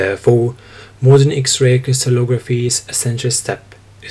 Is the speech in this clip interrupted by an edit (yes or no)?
no